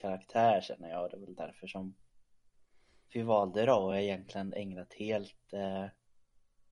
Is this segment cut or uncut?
uncut